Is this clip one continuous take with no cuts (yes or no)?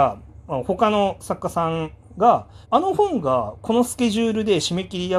no